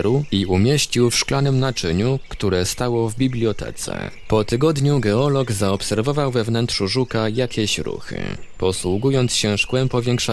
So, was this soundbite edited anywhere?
no; 0 cuts

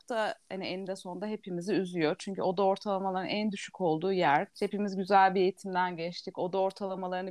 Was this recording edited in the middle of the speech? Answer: yes; 1 cut; at 4.5 s

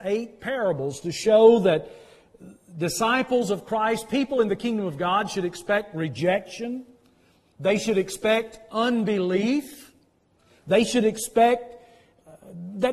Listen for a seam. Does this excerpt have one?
no; 0 cuts

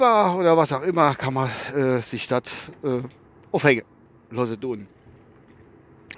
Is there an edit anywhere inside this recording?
no; 0 cuts

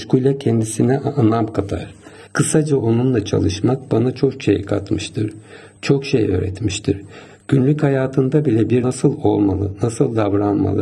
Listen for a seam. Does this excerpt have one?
yes; 2 cuts; at 2.3 s, 8.8 s

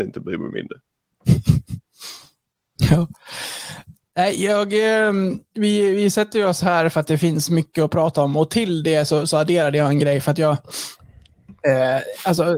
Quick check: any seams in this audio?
no; 0 cuts

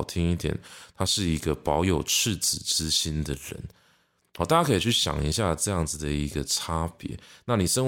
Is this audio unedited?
yes; 0 cuts

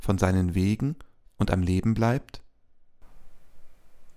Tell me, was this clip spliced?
no; 0 cuts

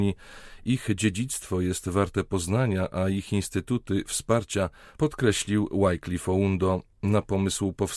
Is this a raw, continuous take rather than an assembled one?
yes; 0 cuts

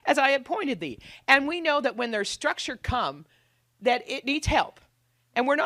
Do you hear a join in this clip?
no; 0 cuts

